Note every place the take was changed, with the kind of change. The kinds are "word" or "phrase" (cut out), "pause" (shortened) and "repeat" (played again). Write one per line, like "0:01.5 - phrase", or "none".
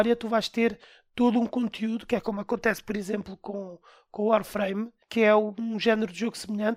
0:05.0 - pause